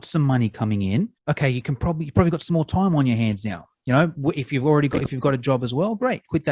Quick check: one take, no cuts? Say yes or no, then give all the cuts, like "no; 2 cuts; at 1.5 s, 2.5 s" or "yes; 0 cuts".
no; 1 cut; at 1.2 s